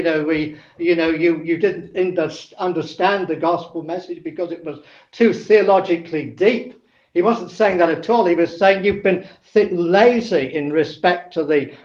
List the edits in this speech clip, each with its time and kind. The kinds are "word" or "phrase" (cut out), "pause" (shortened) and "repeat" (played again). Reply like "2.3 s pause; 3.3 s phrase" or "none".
none